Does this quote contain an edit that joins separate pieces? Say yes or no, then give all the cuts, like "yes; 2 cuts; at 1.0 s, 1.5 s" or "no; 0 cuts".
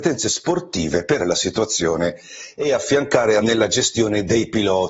yes; 2 cuts; at 1.2 s, 3.4 s